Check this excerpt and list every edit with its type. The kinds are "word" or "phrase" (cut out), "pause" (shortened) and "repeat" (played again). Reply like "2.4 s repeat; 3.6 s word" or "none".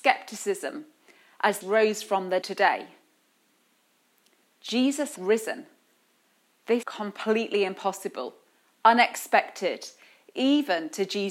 1.6 s phrase; 2.4 s phrase; 5.2 s word; 6.8 s word